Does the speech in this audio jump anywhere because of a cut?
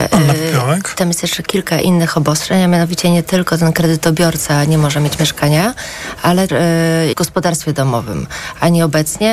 yes; 2 cuts; at 6.5 s, 7.1 s

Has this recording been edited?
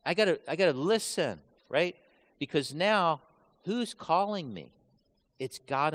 no; 0 cuts

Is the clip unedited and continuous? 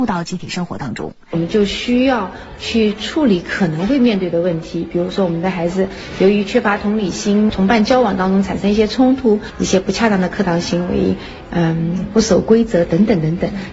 yes; 0 cuts

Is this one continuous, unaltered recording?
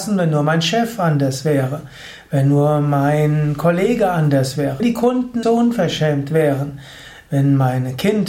no; 2 cuts; at 4.8 s, 5.4 s

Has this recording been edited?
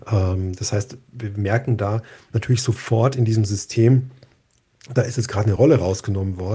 no; 0 cuts

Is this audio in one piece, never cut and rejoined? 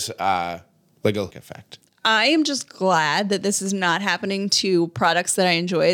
no; 1 cut; at 1.3 s

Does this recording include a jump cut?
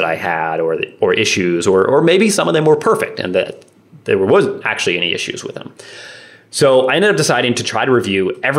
no; 0 cuts

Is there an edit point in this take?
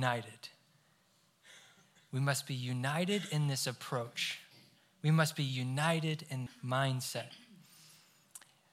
yes; 1 cut; at 6.5 s

